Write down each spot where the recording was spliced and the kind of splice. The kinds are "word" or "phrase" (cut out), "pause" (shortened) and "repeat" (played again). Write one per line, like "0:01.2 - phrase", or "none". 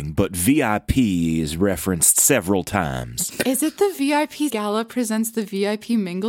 0:04.5 - word

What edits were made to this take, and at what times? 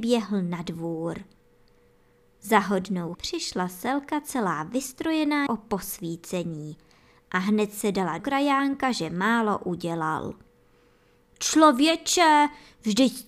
0:03.1 - word
0:05.5 - word
0:08.2 - word

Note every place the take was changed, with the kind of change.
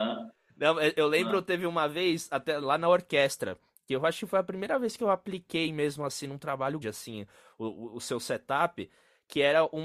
0:06.8 - word

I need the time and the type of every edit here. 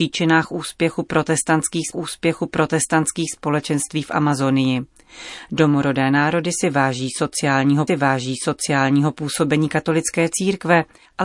0:01.9 - repeat
0:07.9 - repeat

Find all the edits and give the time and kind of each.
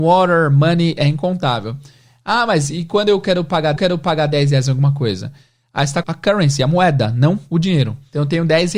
0:03.8 - repeat
0:06.0 - word

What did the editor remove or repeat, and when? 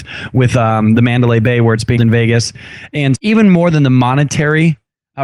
0:02.0 - word
0:03.1 - word

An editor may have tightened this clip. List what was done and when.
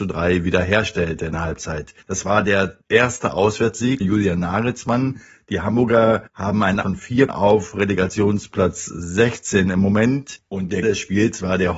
0:01.3 - phrase
0:02.0 - pause
0:02.8 - pause
0:04.0 - word
0:06.3 - pause
0:06.8 - word
0:07.3 - word
0:10.8 - word

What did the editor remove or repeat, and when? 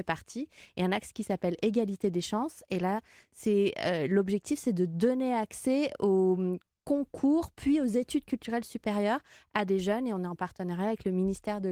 none

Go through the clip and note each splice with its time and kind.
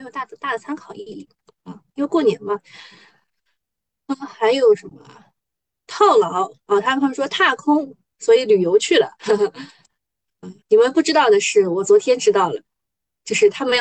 0:04.1 - word
0:06.6 - pause
0:09.1 - pause
0:10.6 - pause

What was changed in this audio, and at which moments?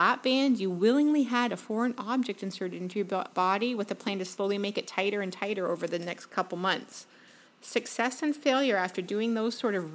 0:07.4 - pause

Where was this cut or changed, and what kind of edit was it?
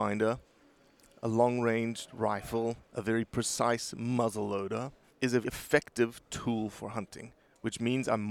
0:02.8 - pause
0:05.1 - pause
0:05.4 - word

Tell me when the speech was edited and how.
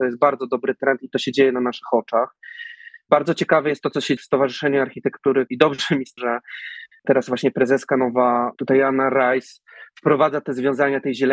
0:03.8 - word
0:04.2 - word
0:05.5 - word
0:06.2 - word

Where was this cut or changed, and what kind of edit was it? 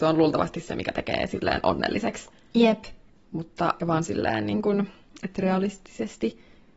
0:03.8 - word

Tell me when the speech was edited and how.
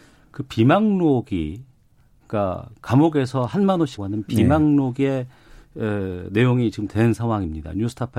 0:04.0 - word
0:06.9 - word

